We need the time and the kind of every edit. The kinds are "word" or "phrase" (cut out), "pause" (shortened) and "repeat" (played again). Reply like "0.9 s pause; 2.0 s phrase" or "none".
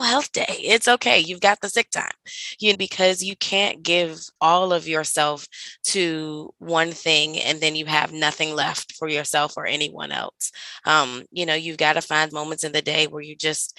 2.7 s word; 4.3 s pause; 12.3 s word